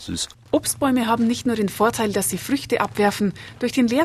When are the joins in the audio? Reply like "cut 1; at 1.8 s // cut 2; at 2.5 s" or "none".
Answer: none